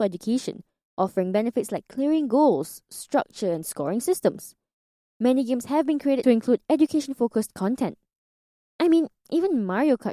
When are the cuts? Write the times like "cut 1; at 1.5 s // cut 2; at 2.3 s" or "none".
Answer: cut 1; at 3.6 s // cut 2; at 6.2 s